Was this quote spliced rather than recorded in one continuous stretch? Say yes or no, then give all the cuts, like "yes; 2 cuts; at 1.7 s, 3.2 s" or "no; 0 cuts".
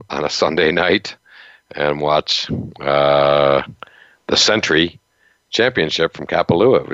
no; 0 cuts